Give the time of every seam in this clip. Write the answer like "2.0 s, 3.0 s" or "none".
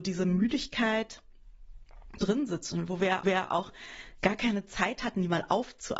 2.2 s, 3.2 s